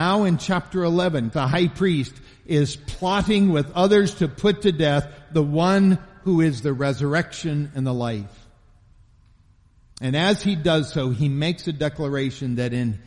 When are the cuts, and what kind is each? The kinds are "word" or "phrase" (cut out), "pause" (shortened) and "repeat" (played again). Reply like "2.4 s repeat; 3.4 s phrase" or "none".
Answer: 1.3 s word